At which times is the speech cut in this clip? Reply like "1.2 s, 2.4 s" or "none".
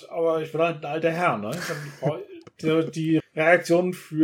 3.2 s